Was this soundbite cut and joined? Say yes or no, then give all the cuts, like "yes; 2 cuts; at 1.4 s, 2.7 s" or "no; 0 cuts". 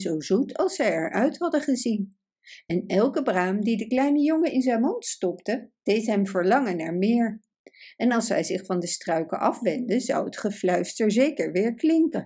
no; 0 cuts